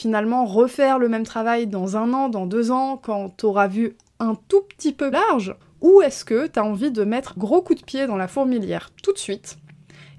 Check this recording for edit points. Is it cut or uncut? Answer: cut